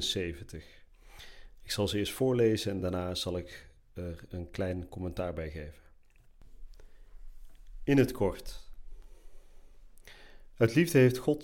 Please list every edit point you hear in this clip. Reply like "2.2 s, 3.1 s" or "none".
none